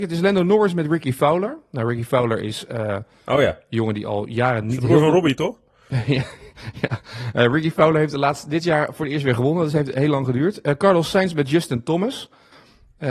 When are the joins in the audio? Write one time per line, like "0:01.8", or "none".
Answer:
none